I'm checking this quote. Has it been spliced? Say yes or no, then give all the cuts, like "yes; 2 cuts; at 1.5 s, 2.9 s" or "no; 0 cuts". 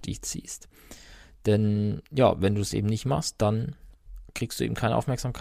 no; 0 cuts